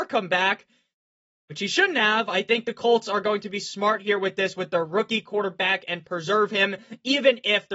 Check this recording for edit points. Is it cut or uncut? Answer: uncut